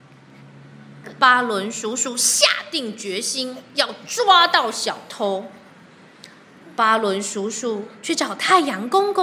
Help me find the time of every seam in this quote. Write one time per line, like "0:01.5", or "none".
none